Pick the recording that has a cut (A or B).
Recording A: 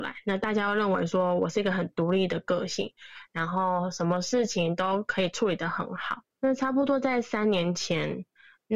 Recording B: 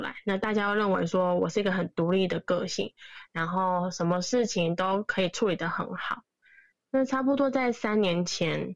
A